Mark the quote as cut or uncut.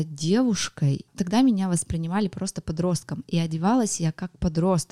uncut